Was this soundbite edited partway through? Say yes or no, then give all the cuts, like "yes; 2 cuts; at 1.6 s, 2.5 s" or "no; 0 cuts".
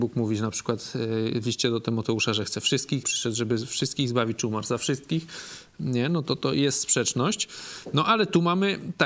yes; 1 cut; at 3.0 s